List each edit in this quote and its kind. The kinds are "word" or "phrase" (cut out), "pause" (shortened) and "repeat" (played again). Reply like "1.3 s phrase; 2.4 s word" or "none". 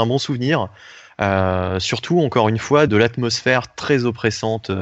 2.9 s word